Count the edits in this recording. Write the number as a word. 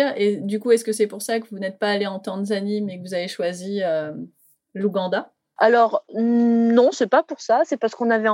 zero